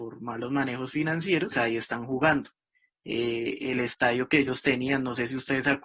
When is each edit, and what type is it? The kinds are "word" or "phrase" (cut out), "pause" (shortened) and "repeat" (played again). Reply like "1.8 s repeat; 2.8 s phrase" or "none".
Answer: none